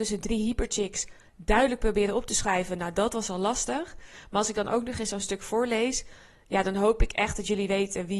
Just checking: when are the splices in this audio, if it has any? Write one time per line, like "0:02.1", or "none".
none